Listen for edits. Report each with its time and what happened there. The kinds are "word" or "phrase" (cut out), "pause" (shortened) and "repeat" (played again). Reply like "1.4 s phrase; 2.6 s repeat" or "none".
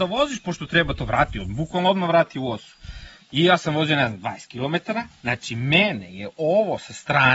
5.2 s pause